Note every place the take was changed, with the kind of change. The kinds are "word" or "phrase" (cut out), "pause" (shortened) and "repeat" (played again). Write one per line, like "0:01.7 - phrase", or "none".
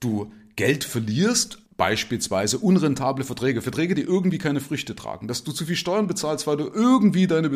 0:01.7 - pause